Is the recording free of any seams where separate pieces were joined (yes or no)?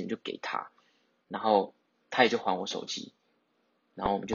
yes